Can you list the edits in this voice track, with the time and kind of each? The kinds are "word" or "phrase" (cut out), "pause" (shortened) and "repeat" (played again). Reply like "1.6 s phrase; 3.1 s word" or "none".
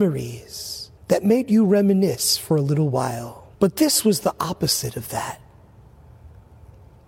1.0 s pause; 3.5 s pause